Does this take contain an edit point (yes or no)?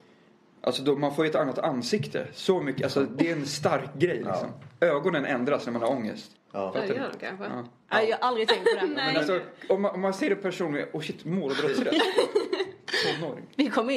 yes